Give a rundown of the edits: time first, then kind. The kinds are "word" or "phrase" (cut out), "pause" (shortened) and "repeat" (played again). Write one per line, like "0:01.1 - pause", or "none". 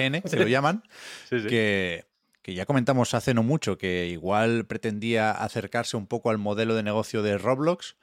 none